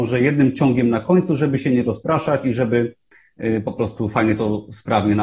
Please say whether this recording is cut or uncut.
uncut